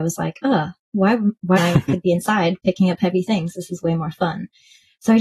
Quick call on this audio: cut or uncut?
cut